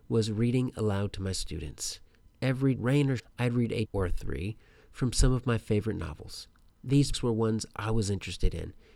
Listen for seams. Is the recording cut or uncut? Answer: cut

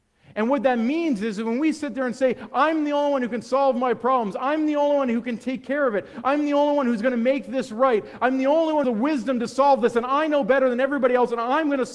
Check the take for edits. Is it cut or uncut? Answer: cut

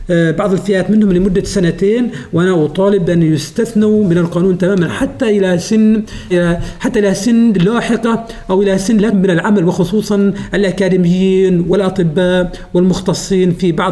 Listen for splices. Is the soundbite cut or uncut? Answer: cut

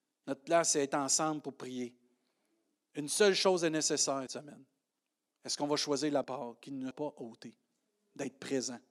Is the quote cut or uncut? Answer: cut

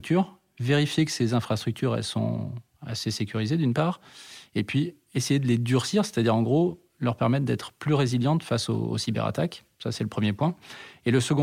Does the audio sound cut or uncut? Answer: uncut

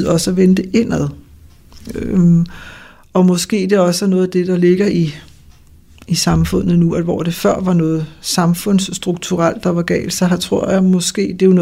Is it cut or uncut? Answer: uncut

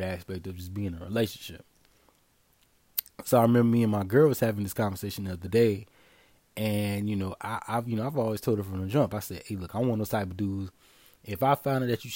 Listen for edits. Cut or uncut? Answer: uncut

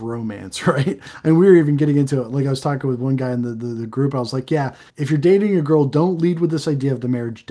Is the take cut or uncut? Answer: cut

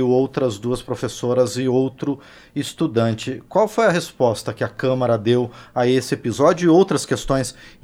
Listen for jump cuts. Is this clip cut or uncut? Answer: uncut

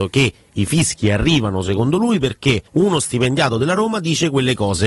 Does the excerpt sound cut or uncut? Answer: cut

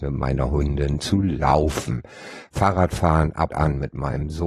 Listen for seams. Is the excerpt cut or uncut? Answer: cut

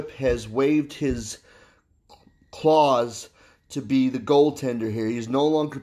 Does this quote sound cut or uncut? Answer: uncut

